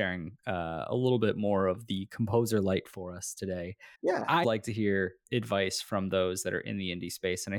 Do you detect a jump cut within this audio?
yes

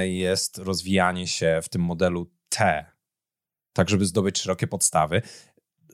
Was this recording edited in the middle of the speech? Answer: no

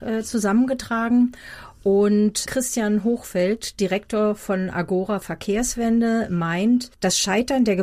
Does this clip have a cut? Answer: yes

